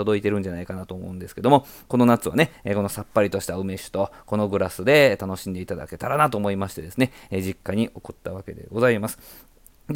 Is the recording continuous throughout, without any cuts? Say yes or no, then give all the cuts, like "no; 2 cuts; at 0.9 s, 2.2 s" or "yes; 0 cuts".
no; 1 cut; at 2.6 s